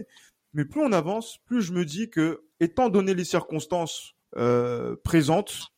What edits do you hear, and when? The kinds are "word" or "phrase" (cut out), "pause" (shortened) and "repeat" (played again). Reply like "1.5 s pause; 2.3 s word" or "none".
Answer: 2.5 s pause; 4.2 s pause